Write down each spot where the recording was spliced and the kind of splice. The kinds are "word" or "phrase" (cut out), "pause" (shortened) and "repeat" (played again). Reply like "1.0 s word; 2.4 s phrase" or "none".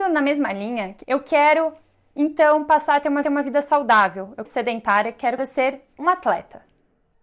1.0 s phrase; 3.2 s repeat; 4.5 s phrase; 5.4 s word